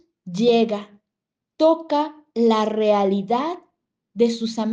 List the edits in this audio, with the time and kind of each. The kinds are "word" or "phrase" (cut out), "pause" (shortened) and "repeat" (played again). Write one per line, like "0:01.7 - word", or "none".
none